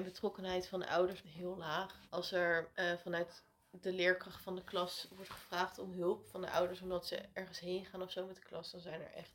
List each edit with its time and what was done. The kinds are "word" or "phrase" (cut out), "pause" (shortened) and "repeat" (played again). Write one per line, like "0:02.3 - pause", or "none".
0:01.2 - phrase
0:02.1 - pause
0:02.7 - pause